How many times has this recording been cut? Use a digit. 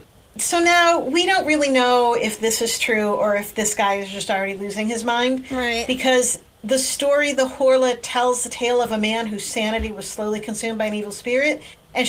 0